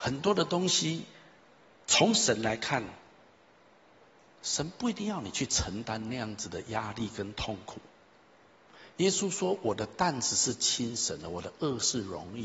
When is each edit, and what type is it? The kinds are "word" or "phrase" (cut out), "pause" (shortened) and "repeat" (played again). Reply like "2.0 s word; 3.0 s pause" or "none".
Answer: none